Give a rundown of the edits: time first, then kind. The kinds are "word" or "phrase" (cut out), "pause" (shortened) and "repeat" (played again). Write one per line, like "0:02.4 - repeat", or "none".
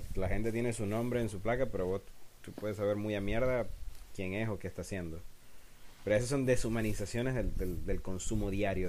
none